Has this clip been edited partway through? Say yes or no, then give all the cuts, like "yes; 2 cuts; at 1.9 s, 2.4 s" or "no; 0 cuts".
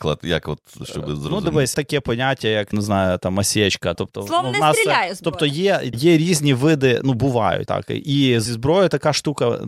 yes; 6 cuts; at 1.7 s, 2.7 s, 3.9 s, 5.9 s, 7.7 s, 8.5 s